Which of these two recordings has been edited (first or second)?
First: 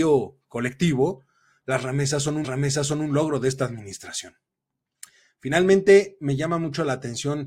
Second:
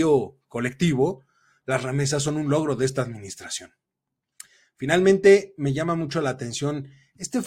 first